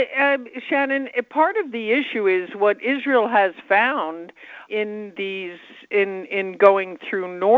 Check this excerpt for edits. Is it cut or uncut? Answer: cut